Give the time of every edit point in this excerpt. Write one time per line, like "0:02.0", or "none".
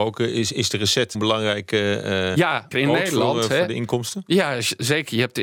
0:01.1
0:02.7

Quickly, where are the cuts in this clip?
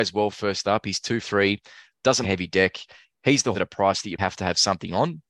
0:01.2
0:02.2
0:03.5
0:04.2

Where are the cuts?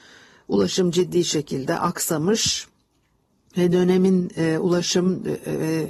none

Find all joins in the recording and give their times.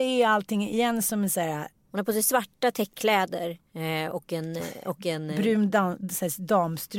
none

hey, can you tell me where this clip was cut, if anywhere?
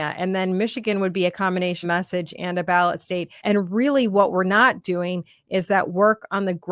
0:01.8
0:03.4

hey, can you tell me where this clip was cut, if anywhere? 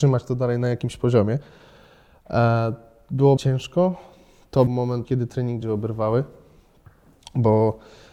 0:03.4
0:04.7
0:05.0
0:05.6

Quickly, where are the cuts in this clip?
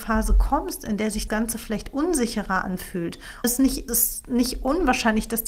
0:01.3
0:03.4
0:03.9

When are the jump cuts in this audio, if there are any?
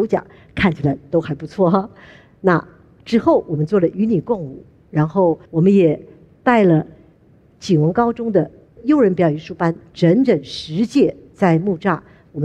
0:05.5

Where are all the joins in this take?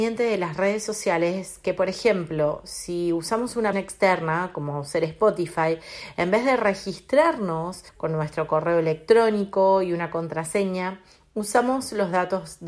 0:03.7
0:07.9

